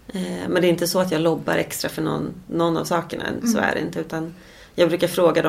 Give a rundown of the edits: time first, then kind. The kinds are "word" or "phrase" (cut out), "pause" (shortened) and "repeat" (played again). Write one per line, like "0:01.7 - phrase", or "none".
none